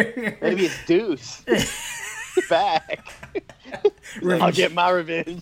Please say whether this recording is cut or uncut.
cut